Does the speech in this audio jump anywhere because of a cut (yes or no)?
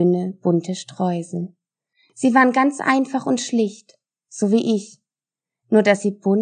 no